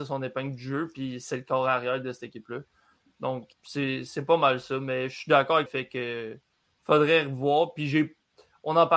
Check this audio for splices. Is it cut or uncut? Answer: cut